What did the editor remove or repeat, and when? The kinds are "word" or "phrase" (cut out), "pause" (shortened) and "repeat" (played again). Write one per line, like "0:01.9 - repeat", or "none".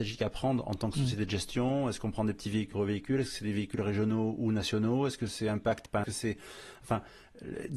0:02.7 - word
0:06.0 - phrase